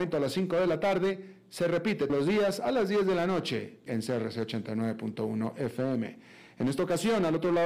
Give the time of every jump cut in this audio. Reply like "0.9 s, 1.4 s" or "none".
2.1 s, 3.9 s